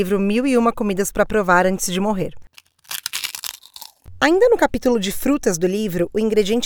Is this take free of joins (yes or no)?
yes